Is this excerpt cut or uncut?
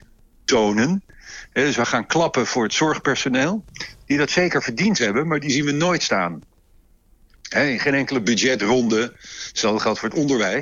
uncut